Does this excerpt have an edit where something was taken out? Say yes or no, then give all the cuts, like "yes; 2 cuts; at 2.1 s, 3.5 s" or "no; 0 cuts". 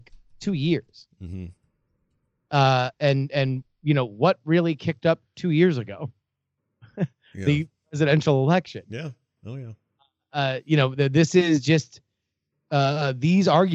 no; 0 cuts